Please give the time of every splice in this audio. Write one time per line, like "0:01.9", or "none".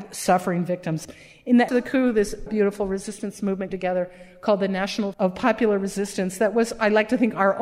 0:01.7
0:02.5
0:03.7
0:05.1